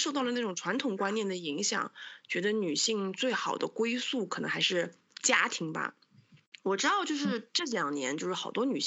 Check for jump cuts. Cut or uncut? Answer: uncut